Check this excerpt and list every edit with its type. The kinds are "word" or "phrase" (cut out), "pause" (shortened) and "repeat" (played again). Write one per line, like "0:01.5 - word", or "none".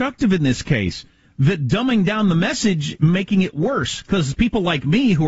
0:03.0 - word